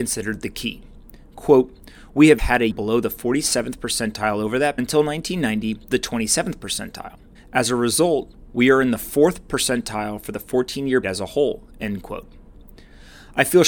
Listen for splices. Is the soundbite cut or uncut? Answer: cut